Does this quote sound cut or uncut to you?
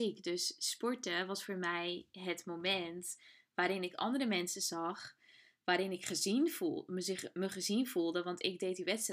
uncut